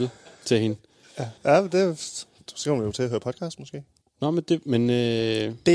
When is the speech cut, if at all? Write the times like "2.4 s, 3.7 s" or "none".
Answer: 1.4 s, 4.0 s